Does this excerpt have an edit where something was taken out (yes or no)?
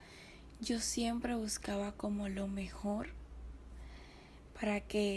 no